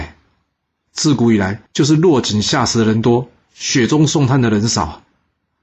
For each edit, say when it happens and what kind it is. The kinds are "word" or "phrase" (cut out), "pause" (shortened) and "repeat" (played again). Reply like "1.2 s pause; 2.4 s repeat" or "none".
1.7 s pause